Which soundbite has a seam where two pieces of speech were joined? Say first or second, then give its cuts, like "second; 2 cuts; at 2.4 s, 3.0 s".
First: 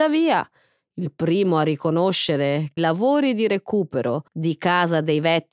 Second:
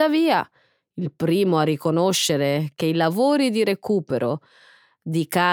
first; 2 cuts; at 2.8 s, 4.3 s